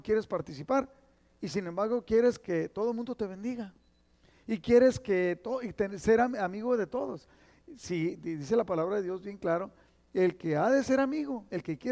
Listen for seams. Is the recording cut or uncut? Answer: uncut